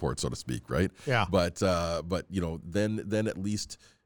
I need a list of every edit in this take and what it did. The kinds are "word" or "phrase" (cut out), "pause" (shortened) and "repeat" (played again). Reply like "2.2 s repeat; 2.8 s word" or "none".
none